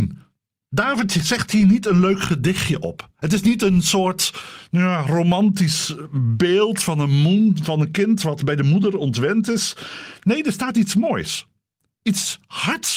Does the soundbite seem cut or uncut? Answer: uncut